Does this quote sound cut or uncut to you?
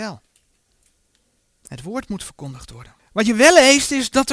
cut